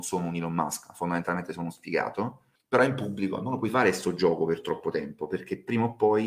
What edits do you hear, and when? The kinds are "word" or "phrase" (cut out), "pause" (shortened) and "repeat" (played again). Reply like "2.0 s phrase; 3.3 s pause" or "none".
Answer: 2.6 s pause